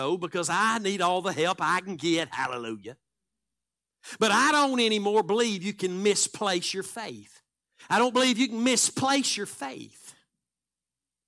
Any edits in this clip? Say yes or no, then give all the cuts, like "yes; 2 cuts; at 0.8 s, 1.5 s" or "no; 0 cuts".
yes; 1 cut; at 7.6 s